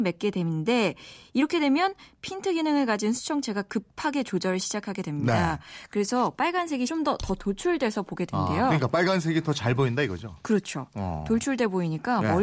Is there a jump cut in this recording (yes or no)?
yes